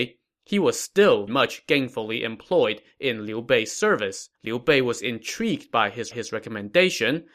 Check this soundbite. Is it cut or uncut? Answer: cut